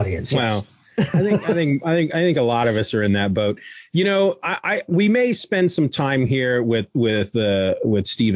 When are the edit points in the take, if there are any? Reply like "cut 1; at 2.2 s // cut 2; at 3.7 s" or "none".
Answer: none

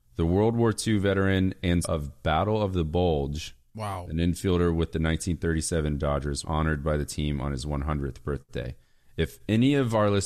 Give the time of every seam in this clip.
cut 1; at 1.8 s // cut 2; at 6.0 s // cut 3; at 6.4 s

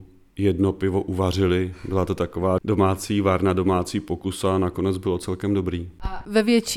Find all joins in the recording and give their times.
none

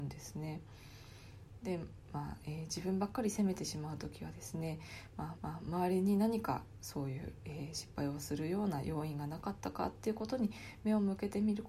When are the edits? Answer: cut 1; at 5.3 s

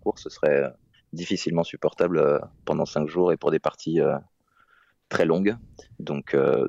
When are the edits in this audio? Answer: none

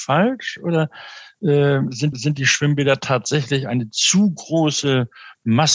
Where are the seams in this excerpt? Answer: cut 1; at 2.1 s

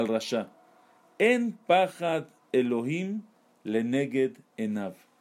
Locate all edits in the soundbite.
none

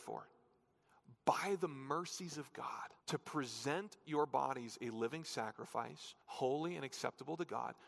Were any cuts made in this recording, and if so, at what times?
cut 1; at 3.0 s // cut 2; at 6.2 s

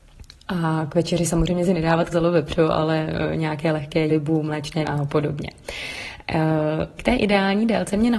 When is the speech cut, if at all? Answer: cut 1; at 2.1 s // cut 2; at 4.1 s // cut 3; at 4.8 s // cut 4; at 7.0 s

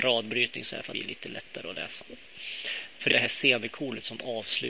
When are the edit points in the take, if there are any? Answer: cut 1; at 0.9 s // cut 2; at 3.1 s

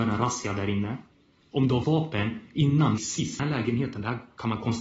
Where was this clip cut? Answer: cut 1; at 1.8 s // cut 2; at 3.0 s // cut 3; at 3.4 s

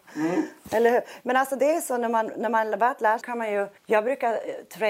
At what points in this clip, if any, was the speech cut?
cut 1; at 3.2 s // cut 2; at 3.8 s

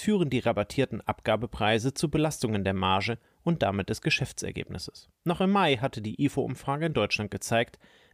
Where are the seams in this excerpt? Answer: cut 1; at 5.1 s

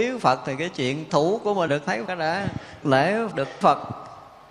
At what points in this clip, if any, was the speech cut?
cut 1; at 1.1 s // cut 2; at 1.7 s // cut 3; at 2.1 s // cut 4; at 2.8 s // cut 5; at 3.3 s // cut 6; at 3.6 s

